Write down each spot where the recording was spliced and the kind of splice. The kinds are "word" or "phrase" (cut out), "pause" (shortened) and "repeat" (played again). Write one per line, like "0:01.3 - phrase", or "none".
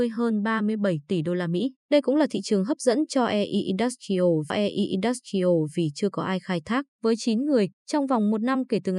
0:01.8 - pause
0:04.5 - repeat
0:06.9 - pause
0:07.8 - pause